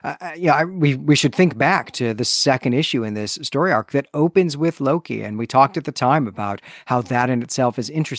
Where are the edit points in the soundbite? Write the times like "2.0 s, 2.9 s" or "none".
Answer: none